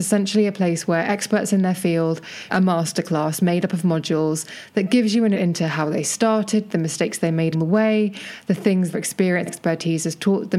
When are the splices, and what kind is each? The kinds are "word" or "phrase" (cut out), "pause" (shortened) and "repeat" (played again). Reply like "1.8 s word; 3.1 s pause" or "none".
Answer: 2.5 s word; 5.3 s word; 7.5 s word; 8.9 s word; 9.5 s word